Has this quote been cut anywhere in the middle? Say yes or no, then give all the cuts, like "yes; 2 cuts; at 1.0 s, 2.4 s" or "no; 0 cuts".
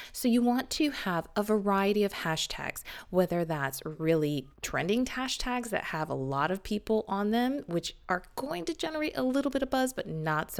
yes; 1 cut; at 4.5 s